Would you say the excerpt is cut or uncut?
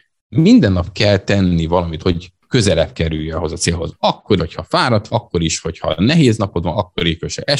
cut